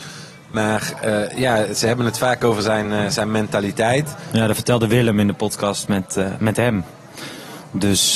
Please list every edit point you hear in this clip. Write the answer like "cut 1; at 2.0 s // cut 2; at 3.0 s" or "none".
none